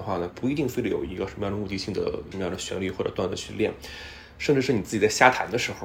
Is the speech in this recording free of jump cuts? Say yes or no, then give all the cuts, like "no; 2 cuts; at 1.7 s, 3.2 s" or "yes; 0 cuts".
yes; 0 cuts